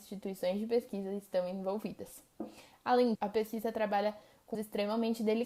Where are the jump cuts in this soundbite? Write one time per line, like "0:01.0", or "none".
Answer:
0:03.1
0:04.5